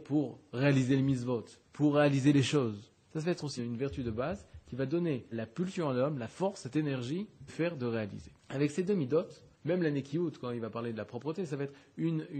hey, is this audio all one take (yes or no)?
no